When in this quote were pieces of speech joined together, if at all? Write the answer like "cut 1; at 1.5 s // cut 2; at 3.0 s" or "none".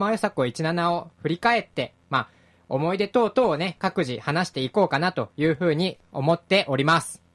none